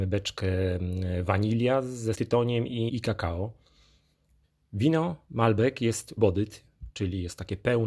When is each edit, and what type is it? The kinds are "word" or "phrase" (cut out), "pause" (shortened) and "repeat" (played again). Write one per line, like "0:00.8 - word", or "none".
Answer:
0:02.1 - word
0:02.9 - word
0:06.2 - word